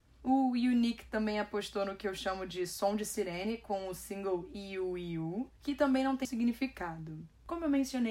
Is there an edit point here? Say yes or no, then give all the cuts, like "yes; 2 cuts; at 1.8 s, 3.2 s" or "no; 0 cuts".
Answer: yes; 1 cut; at 6.2 s